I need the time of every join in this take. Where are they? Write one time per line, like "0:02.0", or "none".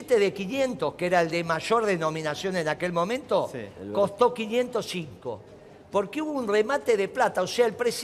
none